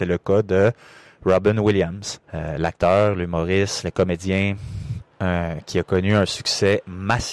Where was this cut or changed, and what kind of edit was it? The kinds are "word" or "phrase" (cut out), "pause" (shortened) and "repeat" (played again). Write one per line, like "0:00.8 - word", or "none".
0:02.2 - pause
0:05.1 - pause